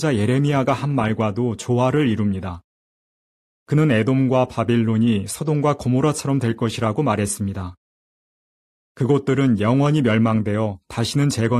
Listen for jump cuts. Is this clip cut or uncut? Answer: uncut